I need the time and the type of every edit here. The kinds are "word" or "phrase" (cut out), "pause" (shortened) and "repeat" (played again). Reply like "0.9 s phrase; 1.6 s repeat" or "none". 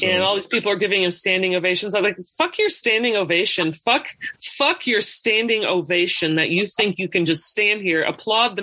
none